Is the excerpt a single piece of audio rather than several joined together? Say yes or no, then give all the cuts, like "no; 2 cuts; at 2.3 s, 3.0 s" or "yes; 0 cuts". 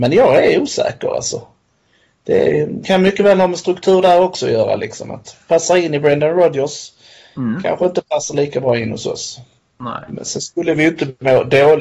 yes; 0 cuts